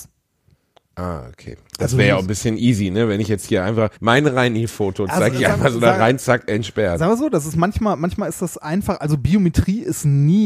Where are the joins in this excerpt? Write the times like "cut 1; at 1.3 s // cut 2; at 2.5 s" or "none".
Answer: cut 1; at 4.0 s